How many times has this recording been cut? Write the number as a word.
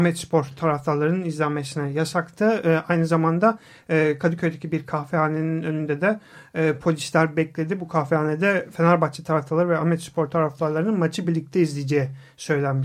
zero